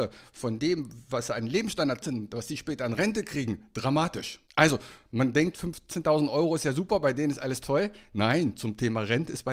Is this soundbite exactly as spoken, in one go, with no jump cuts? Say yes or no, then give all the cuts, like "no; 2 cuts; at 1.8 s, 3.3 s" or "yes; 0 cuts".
no; 2 cuts; at 2.0 s, 4.5 s